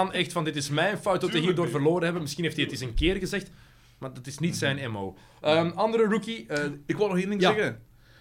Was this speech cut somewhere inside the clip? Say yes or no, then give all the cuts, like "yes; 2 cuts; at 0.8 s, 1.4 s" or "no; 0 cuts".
no; 0 cuts